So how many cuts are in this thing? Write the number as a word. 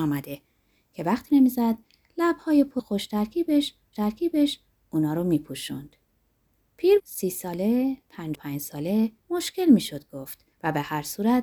seven